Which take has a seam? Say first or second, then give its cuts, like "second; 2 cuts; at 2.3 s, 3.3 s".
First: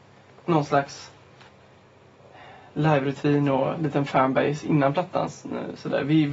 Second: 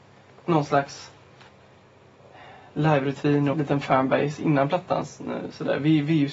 second; 1 cut; at 3.5 s